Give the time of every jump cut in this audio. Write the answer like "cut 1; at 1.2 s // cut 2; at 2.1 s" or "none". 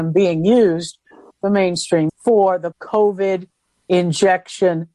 cut 1; at 1.3 s // cut 2; at 2.1 s // cut 3; at 2.7 s